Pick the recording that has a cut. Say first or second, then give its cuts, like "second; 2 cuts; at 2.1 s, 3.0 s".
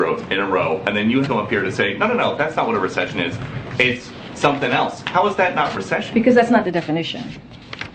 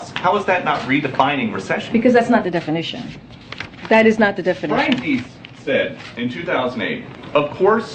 first; 2 cuts; at 1.2 s, 5.7 s